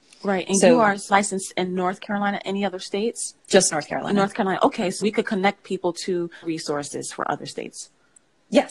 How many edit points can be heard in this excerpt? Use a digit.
4